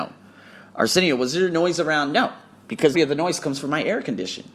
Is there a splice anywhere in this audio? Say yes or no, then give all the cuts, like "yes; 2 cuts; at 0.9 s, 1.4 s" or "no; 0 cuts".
yes; 1 cut; at 2.9 s